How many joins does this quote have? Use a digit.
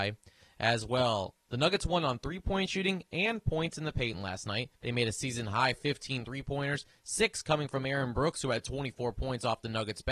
1